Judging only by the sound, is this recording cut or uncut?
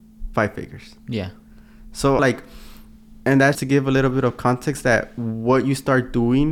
cut